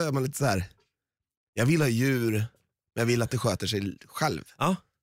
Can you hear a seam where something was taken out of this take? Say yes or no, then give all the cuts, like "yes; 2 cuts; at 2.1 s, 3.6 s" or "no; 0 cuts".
no; 0 cuts